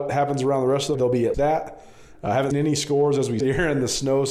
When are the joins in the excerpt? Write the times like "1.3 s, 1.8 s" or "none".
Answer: 0.9 s, 1.3 s, 2.5 s, 3.4 s